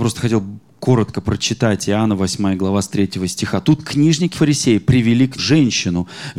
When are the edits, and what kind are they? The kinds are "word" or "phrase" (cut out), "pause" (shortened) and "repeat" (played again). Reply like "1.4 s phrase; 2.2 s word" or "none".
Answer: 1.2 s word; 4.3 s word; 5.4 s word